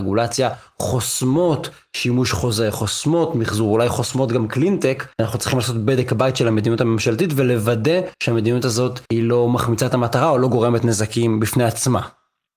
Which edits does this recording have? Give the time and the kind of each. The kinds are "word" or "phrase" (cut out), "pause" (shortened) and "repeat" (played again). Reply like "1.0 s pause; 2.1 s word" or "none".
5.1 s pause; 8.1 s pause; 9.1 s pause